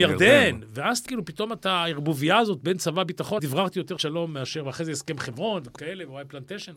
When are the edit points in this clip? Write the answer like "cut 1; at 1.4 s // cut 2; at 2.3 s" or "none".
cut 1; at 1.1 s // cut 2; at 3.4 s // cut 3; at 4.0 s // cut 4; at 5.8 s